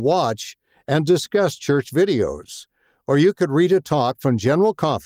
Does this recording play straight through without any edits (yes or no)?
yes